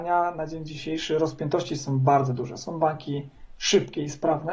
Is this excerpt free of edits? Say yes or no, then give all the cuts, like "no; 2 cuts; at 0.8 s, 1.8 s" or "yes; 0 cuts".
yes; 0 cuts